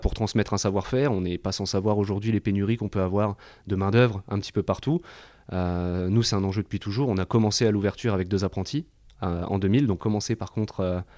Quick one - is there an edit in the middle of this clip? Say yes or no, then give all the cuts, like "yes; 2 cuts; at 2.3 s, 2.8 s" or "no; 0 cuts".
no; 0 cuts